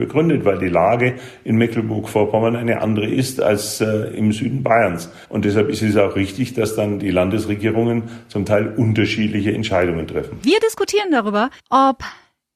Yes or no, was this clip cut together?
yes